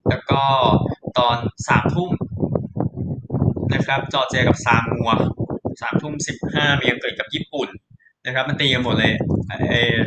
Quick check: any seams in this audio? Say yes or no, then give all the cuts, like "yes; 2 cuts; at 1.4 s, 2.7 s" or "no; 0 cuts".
no; 0 cuts